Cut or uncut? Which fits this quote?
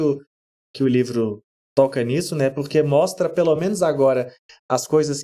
uncut